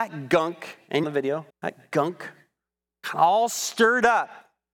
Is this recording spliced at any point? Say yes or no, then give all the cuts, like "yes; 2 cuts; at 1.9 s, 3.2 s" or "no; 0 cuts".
yes; 2 cuts; at 1.0 s, 1.5 s